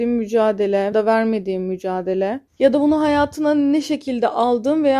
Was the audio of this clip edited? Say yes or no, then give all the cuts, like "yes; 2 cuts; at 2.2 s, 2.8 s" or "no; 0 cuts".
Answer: yes; 2 cuts; at 0.9 s, 2.5 s